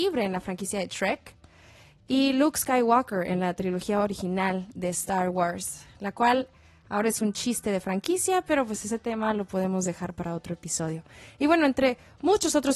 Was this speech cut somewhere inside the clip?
no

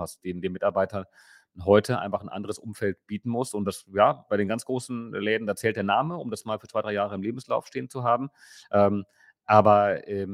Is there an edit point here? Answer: no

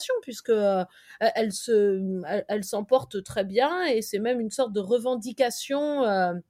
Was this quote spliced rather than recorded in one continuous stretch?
no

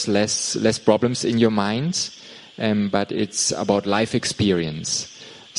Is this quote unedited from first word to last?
yes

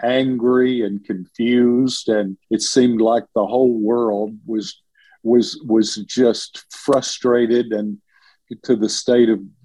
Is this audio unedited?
no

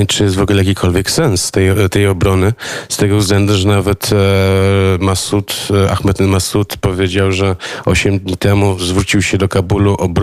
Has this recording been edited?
no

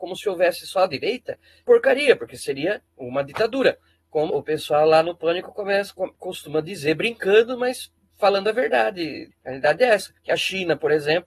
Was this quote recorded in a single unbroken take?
no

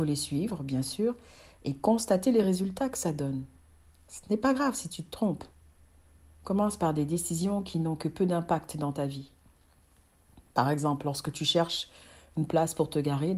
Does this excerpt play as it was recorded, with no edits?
yes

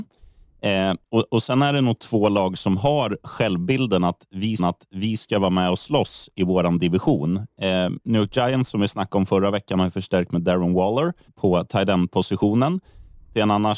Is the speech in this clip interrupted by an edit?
yes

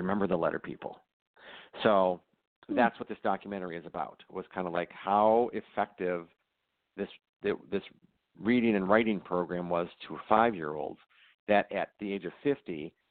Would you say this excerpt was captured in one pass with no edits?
yes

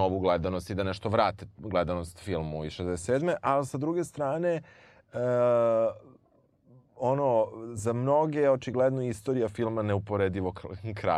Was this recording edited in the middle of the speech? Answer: no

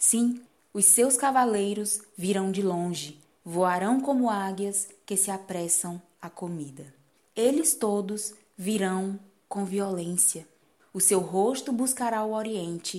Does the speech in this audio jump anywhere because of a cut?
no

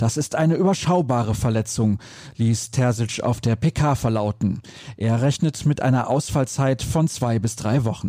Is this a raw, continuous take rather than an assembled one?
yes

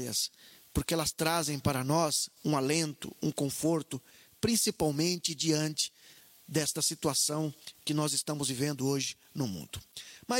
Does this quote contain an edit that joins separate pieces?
no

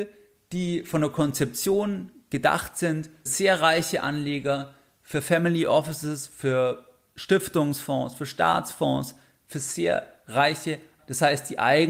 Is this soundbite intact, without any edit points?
no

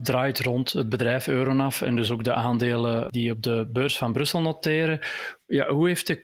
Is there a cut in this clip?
no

